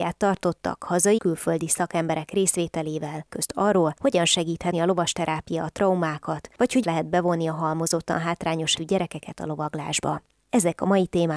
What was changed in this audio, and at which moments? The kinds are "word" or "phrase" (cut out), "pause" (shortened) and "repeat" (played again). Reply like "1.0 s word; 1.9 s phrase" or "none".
1.2 s word; 3.3 s word; 4.7 s word; 6.8 s word; 8.8 s word